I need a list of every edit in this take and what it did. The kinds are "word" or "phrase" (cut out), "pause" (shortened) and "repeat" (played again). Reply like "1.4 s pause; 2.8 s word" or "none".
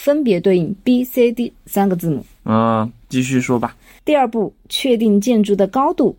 none